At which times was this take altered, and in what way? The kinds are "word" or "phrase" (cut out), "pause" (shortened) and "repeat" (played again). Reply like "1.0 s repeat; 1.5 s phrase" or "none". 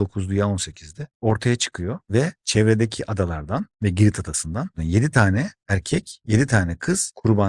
1.1 s pause; 2.4 s pause